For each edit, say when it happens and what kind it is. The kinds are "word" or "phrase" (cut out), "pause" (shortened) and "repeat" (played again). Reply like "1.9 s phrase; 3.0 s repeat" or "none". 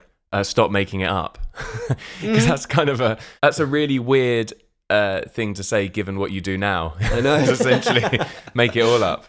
3.4 s pause; 7.4 s word